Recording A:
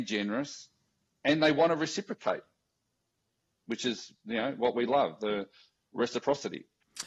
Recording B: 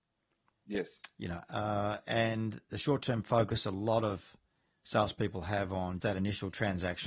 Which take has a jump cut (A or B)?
B